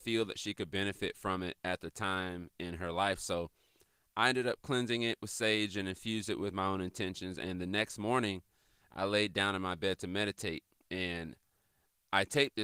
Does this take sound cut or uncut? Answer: cut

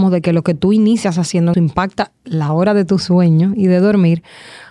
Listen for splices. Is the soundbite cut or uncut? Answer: cut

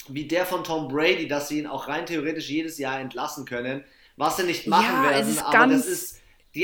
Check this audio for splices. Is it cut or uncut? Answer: uncut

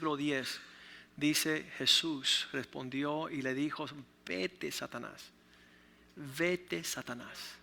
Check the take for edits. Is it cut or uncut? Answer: uncut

